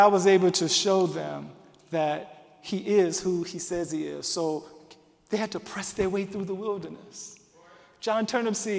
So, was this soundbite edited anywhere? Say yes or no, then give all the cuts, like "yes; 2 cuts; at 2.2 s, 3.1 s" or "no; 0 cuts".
no; 0 cuts